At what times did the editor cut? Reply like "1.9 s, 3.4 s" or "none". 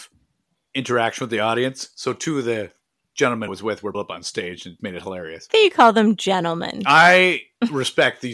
3.5 s, 3.9 s, 4.8 s, 5.5 s

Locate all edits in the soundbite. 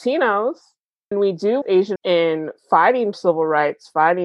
1.1 s, 1.6 s, 2.0 s, 3.1 s

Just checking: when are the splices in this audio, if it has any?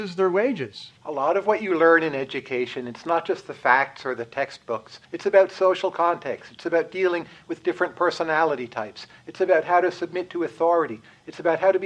1.0 s, 5.0 s

